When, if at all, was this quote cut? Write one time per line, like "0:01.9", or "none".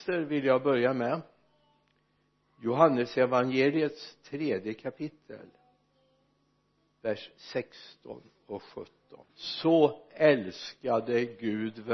0:09.2